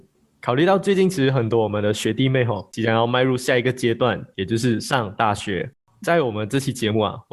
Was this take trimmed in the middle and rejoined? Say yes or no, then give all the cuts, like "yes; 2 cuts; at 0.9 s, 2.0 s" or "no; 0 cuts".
no; 0 cuts